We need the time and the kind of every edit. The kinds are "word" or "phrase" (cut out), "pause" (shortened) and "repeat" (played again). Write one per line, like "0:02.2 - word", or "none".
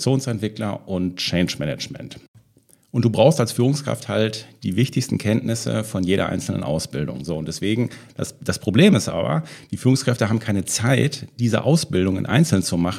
none